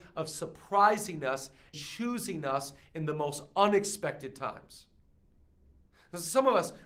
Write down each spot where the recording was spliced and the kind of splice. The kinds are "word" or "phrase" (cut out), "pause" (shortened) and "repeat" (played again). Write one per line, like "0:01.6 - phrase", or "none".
0:01.7 - word